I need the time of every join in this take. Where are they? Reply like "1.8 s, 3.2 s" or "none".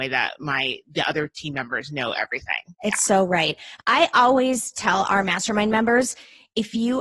2.7 s, 3.8 s